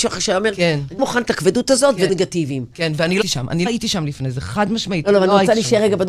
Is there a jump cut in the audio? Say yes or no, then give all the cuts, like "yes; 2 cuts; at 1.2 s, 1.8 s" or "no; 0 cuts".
yes; 4 cuts; at 1.0 s, 2.1 s, 3.2 s, 3.7 s